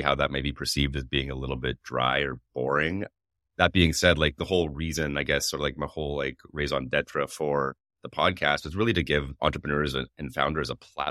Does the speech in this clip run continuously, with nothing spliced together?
yes; 0 cuts

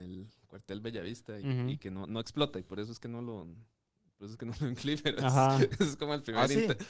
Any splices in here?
no; 0 cuts

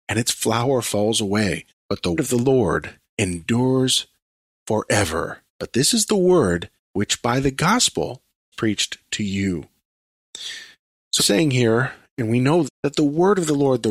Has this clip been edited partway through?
yes; 8 cuts; at 1.7 s, 2.2 s, 3.1 s, 5.5 s, 6.8 s, 8.5 s, 11.2 s, 12.6 s

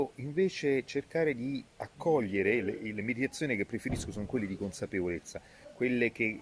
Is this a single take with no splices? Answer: no; 1 cut; at 1.7 s

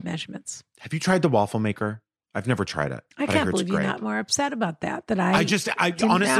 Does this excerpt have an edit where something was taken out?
no; 0 cuts

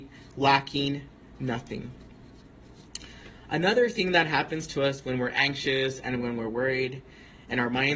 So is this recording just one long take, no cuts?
yes; 0 cuts

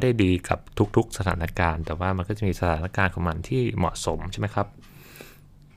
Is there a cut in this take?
no; 0 cuts

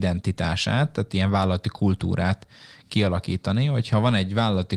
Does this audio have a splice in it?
no; 0 cuts

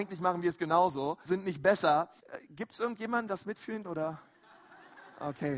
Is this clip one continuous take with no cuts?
no; 4 cuts; at 1.2 s, 2.2 s, 3.3 s, 3.8 s

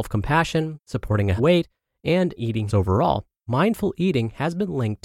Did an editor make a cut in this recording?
yes; 4 cuts; at 1.4 s, 2.4 s, 2.7 s, 3.3 s

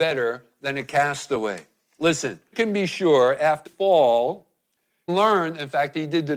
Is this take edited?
yes; 3 cuts; at 2.5 s, 3.7 s, 5.1 s

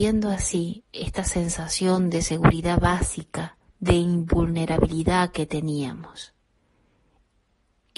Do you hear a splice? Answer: yes; 1 cut; at 3.7 s

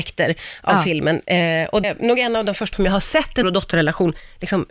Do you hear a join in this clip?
yes; 3 cuts; at 1.8 s, 2.7 s, 3.4 s

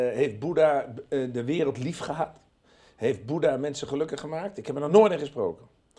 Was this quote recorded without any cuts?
yes; 0 cuts

